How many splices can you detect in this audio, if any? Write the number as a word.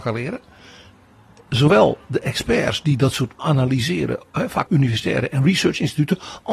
two